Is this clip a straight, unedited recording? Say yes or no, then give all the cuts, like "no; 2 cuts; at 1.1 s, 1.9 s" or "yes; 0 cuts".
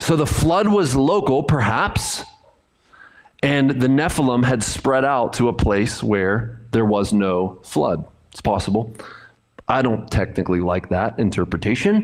yes; 0 cuts